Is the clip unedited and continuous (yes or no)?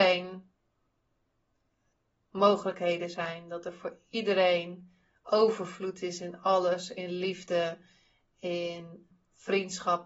yes